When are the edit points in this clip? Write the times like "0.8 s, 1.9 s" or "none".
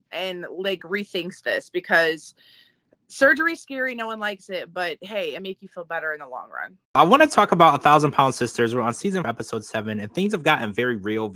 5.4 s, 6.8 s, 9.2 s